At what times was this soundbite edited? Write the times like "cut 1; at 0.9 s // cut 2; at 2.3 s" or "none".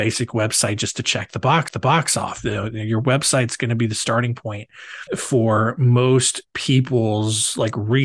cut 1; at 1.7 s // cut 2; at 5.1 s // cut 3; at 6.5 s